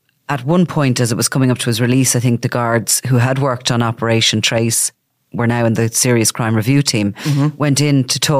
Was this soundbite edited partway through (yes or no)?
no